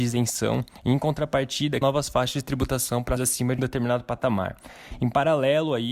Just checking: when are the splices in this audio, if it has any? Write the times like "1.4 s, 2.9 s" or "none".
1.8 s, 3.2 s, 3.6 s